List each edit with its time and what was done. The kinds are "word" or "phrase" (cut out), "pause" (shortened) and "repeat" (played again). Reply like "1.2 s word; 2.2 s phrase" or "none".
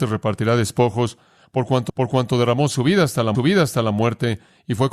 1.9 s repeat; 3.3 s repeat